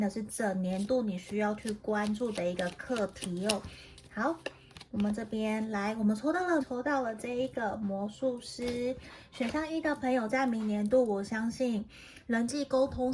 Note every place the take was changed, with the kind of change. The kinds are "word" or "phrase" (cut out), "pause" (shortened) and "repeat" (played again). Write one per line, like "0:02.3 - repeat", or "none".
0:06.6 - word